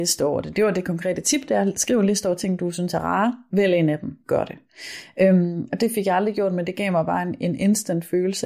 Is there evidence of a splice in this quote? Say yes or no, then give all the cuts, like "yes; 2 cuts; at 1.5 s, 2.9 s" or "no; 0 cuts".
no; 0 cuts